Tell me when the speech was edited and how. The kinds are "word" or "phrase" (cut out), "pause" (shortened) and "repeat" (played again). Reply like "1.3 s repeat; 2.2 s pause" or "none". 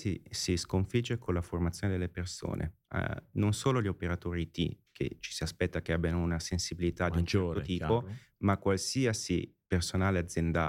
9.6 s pause